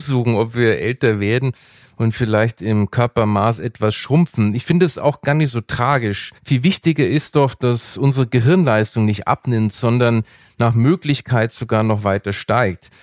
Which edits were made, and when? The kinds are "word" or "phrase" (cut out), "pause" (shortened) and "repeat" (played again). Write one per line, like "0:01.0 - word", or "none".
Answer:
0:06.4 - pause

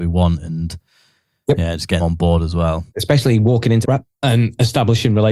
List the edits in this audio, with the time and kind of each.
0:02.0 - word
0:02.9 - pause
0:03.8 - word

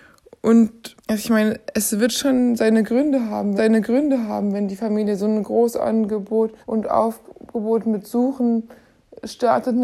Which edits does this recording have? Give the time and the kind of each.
0:01.0 - pause
0:03.6 - repeat
0:06.6 - pause

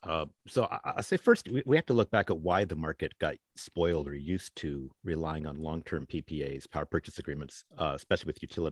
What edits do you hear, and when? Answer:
0:04.9 - pause
0:07.7 - pause

